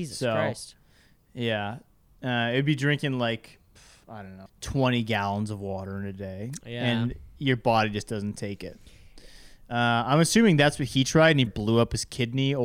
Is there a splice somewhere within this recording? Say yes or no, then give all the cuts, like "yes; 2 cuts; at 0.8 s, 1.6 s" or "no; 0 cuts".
yes; 3 cuts; at 3.8 s, 4.5 s, 11.5 s